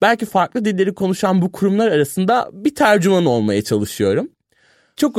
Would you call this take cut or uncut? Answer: uncut